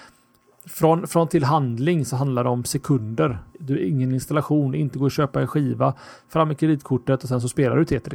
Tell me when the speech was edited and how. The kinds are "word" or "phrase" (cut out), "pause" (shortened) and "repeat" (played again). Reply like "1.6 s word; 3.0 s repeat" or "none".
1.3 s word; 3.5 s pause